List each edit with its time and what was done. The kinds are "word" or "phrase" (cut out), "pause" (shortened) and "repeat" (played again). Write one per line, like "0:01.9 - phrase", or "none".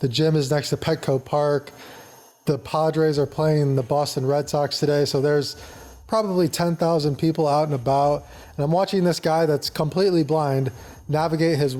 none